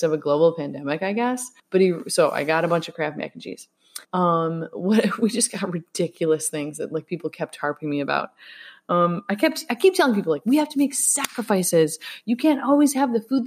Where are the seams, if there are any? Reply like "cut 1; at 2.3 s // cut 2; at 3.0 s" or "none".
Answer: cut 1; at 1.6 s // cut 2; at 4.0 s